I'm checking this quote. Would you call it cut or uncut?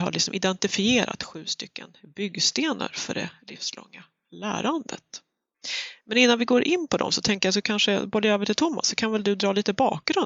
uncut